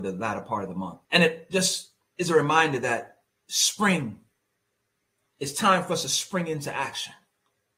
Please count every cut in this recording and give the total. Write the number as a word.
two